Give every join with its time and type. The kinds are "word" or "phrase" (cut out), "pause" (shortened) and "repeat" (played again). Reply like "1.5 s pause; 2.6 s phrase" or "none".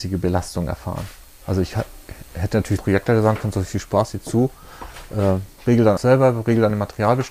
2.8 s word; 5.6 s pause; 6.0 s word